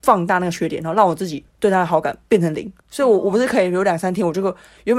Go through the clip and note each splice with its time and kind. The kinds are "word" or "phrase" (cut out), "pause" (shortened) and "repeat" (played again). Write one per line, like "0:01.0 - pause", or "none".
0:01.5 - pause
0:02.8 - pause